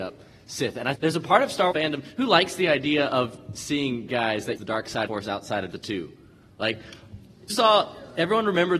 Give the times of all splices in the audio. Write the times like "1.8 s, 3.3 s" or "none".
0.9 s, 1.7 s, 4.1 s, 4.6 s, 5.1 s, 5.7 s, 7.5 s